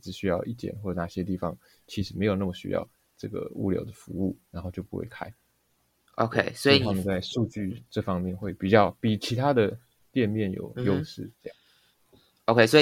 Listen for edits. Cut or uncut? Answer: uncut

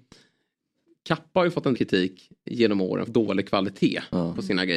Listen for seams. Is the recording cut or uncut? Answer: cut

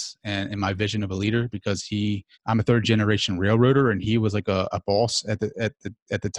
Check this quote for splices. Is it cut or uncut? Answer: cut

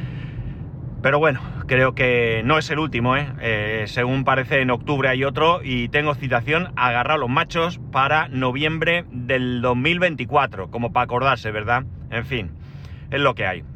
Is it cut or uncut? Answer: uncut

